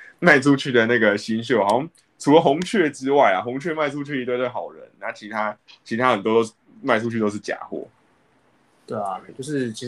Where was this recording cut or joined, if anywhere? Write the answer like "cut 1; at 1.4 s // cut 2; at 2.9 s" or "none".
none